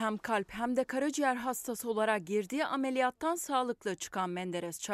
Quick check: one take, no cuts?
yes; 0 cuts

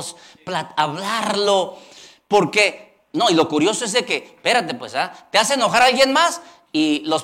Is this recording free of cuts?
yes; 0 cuts

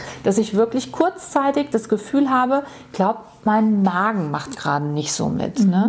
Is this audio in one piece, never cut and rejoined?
yes; 0 cuts

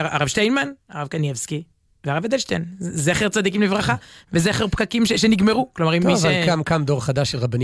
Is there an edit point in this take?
no; 0 cuts

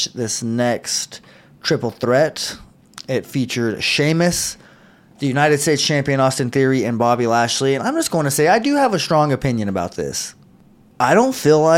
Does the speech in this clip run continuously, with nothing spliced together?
yes; 0 cuts

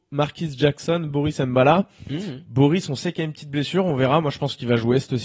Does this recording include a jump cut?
no; 0 cuts

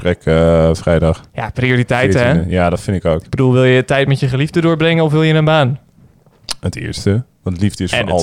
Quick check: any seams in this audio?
yes; 1 cut; at 7.3 s

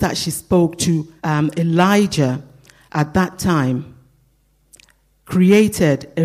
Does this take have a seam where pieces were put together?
yes; 1 cut; at 1.2 s

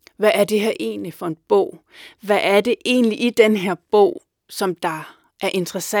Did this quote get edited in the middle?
no; 0 cuts

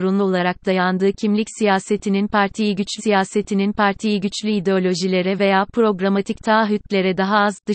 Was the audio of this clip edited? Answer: yes; 1 cut; at 3.0 s

